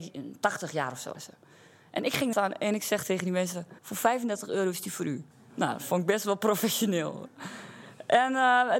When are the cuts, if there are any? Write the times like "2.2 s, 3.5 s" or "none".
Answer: 1.1 s, 2.3 s, 3.8 s, 5.3 s